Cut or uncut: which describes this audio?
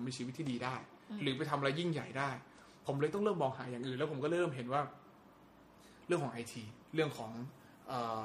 cut